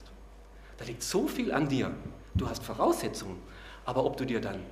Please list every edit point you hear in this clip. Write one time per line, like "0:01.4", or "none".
none